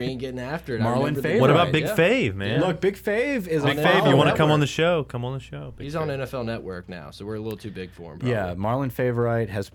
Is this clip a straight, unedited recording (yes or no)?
yes